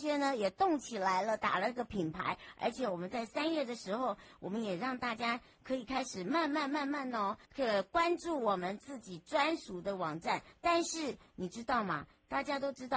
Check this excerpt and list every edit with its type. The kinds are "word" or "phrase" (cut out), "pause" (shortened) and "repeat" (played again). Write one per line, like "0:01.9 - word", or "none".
0:07.4 - pause